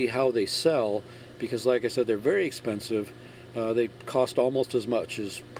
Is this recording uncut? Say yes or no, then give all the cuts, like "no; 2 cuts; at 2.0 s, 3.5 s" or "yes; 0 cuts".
yes; 0 cuts